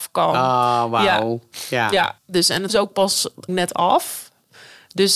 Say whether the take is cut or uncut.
cut